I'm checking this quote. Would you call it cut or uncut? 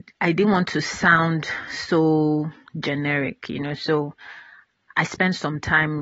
uncut